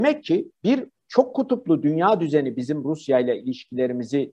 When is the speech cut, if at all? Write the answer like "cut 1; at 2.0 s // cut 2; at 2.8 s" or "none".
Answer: cut 1; at 1.0 s